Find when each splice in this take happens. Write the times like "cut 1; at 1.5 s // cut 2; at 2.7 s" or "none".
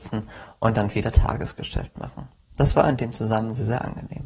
none